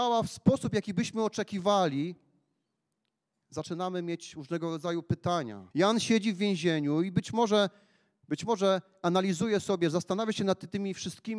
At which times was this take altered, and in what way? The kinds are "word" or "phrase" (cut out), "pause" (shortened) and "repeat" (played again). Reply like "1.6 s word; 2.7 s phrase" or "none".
5.7 s pause